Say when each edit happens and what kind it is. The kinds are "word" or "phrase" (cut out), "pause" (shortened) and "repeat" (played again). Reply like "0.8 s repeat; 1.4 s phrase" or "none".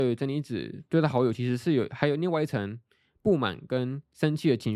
none